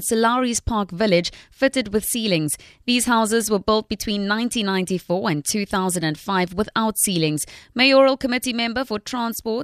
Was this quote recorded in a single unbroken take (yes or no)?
yes